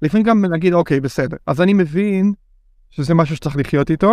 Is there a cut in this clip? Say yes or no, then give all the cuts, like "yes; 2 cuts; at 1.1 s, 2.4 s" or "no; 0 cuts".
no; 0 cuts